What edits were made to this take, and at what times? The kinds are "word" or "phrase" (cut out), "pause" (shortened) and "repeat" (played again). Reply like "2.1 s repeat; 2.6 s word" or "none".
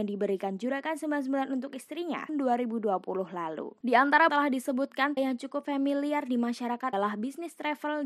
2.3 s phrase; 4.3 s phrase; 5.2 s word; 6.9 s word